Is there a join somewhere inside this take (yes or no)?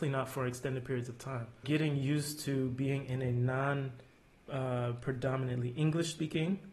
yes